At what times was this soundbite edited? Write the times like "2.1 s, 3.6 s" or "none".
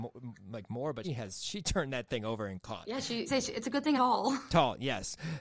1.0 s, 3.3 s, 3.9 s